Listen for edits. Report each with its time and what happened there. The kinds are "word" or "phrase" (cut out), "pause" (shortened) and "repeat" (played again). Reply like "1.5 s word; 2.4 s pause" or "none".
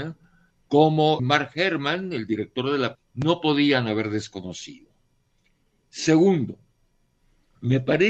1.2 s word; 2.9 s word